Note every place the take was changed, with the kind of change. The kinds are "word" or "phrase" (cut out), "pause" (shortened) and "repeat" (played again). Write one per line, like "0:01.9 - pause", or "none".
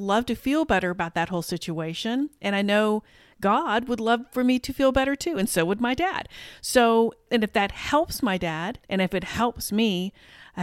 0:08.8 - pause